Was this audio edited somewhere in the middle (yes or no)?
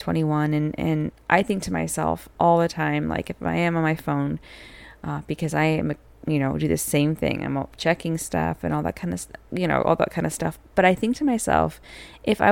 yes